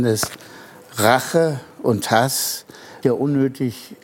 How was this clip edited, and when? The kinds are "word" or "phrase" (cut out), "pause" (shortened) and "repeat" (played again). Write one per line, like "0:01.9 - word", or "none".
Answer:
0:03.0 - word